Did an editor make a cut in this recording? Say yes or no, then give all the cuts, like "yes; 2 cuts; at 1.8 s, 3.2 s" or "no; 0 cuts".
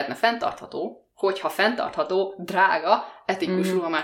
no; 0 cuts